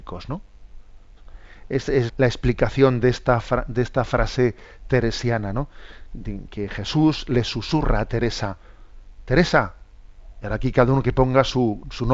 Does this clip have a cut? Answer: yes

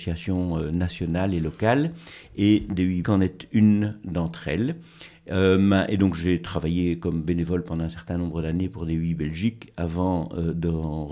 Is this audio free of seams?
no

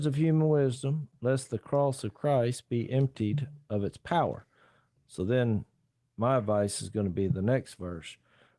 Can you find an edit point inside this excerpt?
no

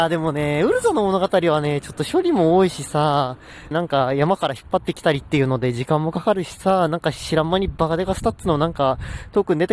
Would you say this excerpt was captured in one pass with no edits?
no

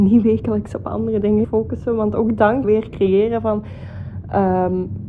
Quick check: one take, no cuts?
no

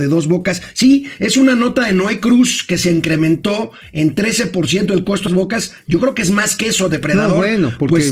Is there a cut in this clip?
yes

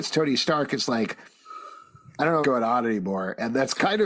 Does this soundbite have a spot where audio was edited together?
yes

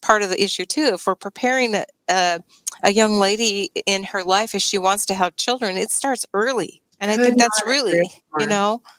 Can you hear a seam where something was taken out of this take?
yes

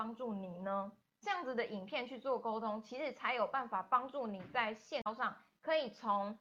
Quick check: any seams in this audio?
yes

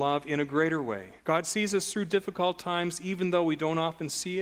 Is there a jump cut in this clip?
yes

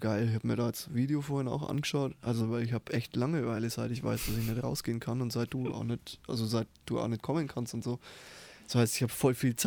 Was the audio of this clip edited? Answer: no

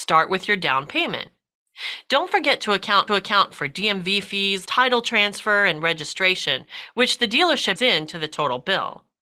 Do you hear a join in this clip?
yes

